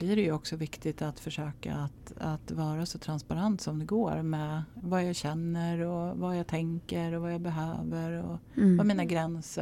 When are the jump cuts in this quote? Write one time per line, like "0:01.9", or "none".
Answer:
0:04.8